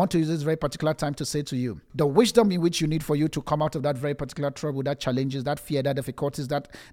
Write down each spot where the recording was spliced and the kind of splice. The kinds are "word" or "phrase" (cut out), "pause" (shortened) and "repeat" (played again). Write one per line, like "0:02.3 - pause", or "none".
none

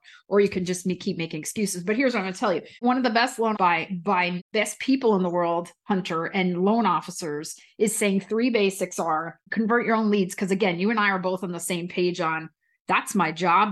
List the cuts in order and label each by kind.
0:02.8 - pause
0:03.5 - word

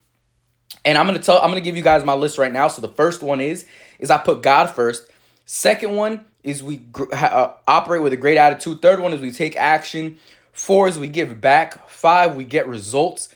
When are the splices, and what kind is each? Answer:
none

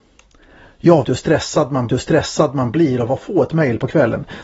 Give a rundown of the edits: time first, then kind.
0:01.0 - word
0:01.9 - repeat

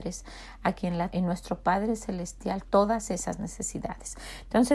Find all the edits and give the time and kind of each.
0:01.1 - word
0:02.7 - word

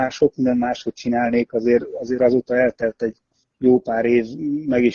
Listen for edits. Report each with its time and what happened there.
none

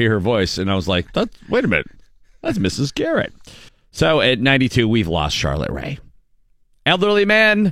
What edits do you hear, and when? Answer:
0:01.1 - word
0:03.7 - pause

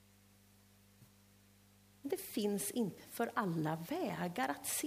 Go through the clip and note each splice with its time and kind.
0:03.0 - word

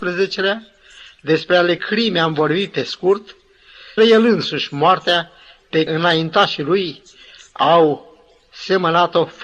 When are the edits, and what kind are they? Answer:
0:01.8 - word
0:04.0 - word
0:05.9 - word

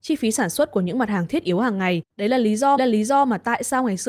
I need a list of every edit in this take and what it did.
0:02.1 - pause
0:02.8 - repeat

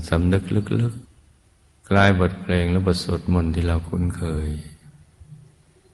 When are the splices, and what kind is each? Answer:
0:01.0 - pause

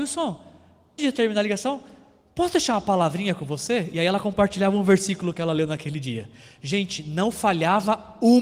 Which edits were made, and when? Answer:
0:01.0 - word

